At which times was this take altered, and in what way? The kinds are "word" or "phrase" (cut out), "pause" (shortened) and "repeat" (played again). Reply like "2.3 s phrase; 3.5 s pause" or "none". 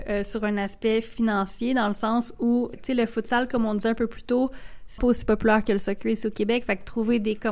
2.7 s word; 5.0 s word